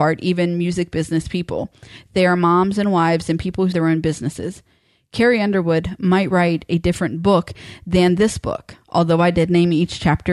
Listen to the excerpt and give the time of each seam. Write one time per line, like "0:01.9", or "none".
0:03.7